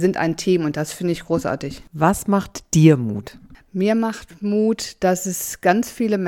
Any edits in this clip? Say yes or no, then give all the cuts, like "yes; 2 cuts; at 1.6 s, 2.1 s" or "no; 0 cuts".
no; 0 cuts